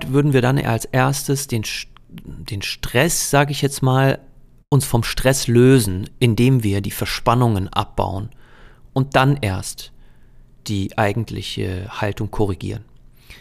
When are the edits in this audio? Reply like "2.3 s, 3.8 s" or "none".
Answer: none